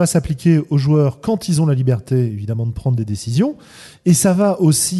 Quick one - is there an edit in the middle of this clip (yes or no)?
no